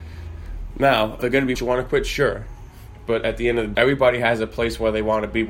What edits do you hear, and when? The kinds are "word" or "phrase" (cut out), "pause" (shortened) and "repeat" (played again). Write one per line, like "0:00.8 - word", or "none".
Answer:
0:01.2 - word
0:01.6 - word
0:03.8 - word